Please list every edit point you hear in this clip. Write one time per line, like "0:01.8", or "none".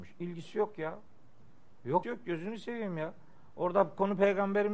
0:02.0